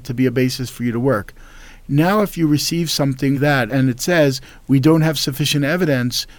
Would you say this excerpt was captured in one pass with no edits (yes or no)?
no